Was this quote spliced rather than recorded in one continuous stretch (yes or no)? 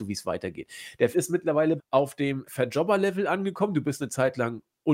yes